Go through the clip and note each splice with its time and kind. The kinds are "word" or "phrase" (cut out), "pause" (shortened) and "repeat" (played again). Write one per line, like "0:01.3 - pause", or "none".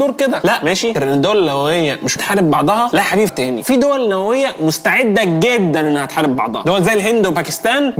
0:00.9 - phrase
0:02.2 - word
0:03.3 - word